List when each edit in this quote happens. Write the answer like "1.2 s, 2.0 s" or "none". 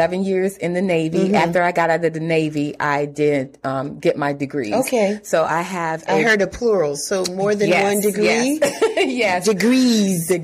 none